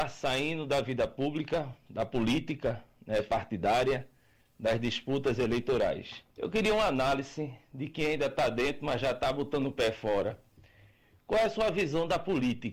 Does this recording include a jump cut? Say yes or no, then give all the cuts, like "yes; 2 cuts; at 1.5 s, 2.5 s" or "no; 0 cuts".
yes; 1 cut; at 6.3 s